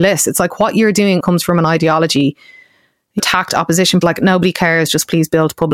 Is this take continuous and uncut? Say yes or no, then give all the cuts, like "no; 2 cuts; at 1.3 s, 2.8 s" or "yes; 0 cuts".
no; 3 cuts; at 1.2 s, 3.2 s, 4.0 s